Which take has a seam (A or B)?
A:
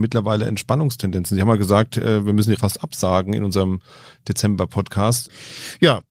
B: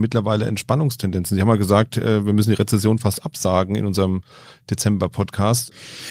A